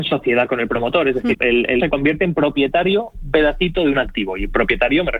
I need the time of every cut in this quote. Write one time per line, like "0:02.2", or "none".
0:01.3
0:01.8
0:03.3